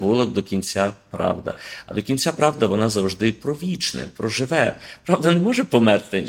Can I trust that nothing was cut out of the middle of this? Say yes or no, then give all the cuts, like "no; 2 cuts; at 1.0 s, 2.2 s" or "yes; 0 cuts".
yes; 0 cuts